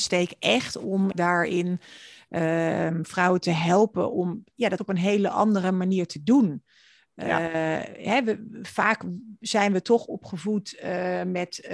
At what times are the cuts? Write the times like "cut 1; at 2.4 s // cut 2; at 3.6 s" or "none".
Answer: cut 1; at 1.1 s // cut 2; at 4.8 s

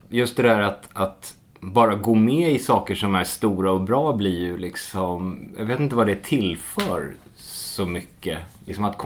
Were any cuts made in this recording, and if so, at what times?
none

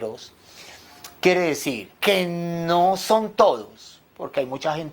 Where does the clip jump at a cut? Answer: cut 1; at 1.9 s

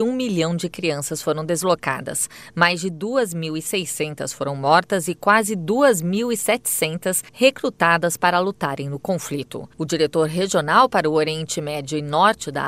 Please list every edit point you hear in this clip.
cut 1; at 7.3 s // cut 2; at 9.7 s

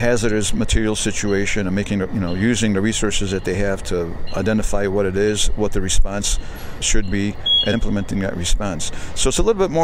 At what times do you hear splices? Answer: cut 1; at 6.8 s // cut 2; at 7.7 s

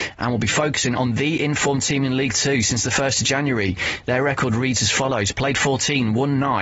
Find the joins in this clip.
none

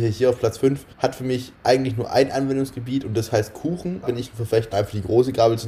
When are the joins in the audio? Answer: cut 1; at 0.9 s // cut 2; at 1.5 s // cut 3; at 4.0 s // cut 4; at 4.7 s

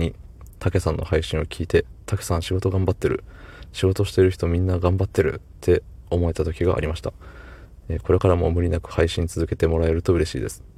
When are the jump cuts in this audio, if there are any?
cut 1; at 2.0 s

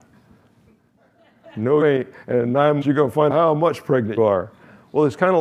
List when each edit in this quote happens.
cut 1; at 1.8 s // cut 2; at 2.8 s // cut 3; at 3.3 s // cut 4; at 4.2 s

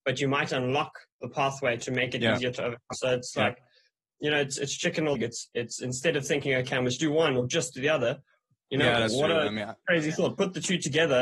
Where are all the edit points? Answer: cut 1; at 2.9 s // cut 2; at 5.2 s // cut 3; at 7.0 s

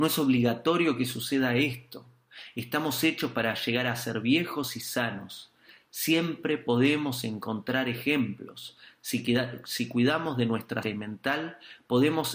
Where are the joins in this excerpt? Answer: cut 1; at 10.8 s

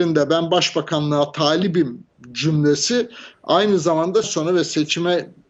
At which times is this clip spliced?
cut 1; at 4.2 s

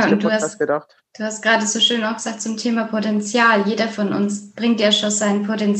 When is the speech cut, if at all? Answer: cut 1; at 1.1 s

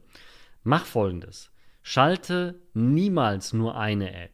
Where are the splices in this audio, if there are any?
none

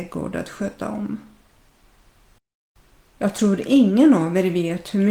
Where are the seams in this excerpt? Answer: none

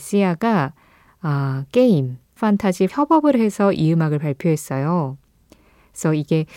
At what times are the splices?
cut 1; at 2.4 s // cut 2; at 2.9 s

